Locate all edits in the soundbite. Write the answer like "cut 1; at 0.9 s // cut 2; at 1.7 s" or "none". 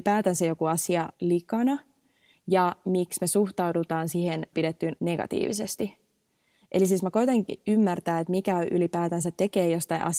cut 1; at 1.1 s // cut 2; at 4.5 s // cut 3; at 5.0 s